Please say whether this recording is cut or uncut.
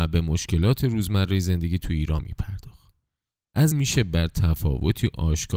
cut